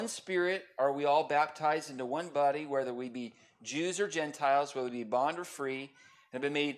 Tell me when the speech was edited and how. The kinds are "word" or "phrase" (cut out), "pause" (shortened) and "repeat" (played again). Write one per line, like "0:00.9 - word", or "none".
none